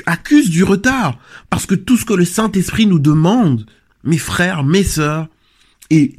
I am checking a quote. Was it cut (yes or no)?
no